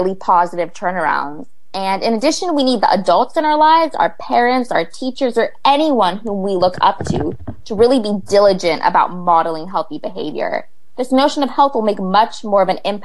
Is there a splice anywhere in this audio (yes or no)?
no